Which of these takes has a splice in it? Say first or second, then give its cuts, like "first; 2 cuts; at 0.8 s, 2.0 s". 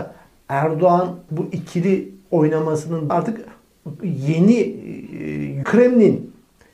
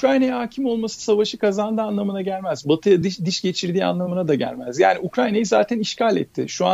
first; 3 cuts; at 1.3 s, 3.1 s, 5.6 s